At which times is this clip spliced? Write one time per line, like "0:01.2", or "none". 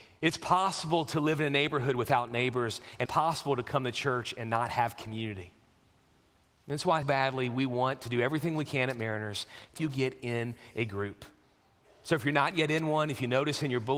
0:03.1
0:07.0
0:09.8